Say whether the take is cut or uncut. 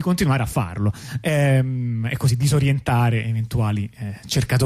uncut